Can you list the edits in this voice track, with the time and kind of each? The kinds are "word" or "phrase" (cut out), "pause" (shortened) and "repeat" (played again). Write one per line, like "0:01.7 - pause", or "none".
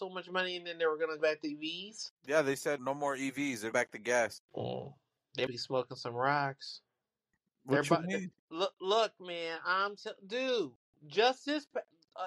0:01.2 - word
0:02.2 - pause
0:02.8 - word
0:03.7 - word
0:04.4 - pause
0:05.5 - word
0:08.4 - pause